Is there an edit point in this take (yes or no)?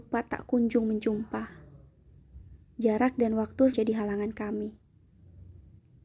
yes